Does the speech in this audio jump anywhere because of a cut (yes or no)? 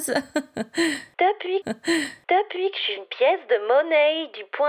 yes